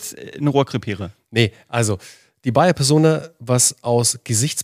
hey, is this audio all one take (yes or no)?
yes